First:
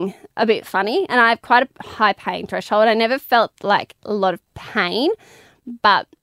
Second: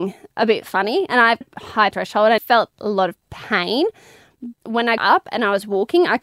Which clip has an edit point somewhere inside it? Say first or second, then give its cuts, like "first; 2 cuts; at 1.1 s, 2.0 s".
second; 6 cuts; at 1.4 s, 1.9 s, 2.4 s, 2.7 s, 4.5 s, 5.0 s